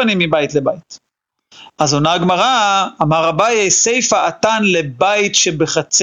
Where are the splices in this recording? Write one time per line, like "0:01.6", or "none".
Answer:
none